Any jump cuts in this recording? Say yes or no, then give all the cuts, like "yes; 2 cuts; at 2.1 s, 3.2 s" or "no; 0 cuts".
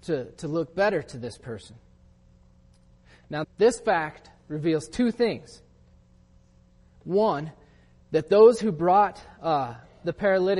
yes; 1 cut; at 3.4 s